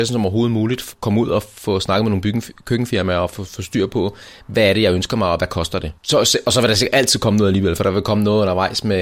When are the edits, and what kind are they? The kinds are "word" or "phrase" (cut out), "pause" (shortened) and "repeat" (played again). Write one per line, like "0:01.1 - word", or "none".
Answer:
0:06.0 - pause